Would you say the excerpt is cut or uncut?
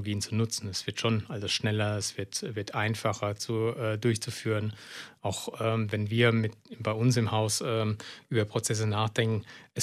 uncut